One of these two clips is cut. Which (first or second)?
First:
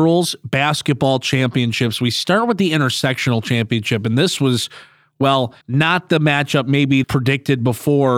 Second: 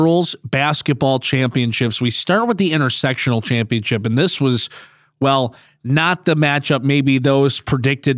first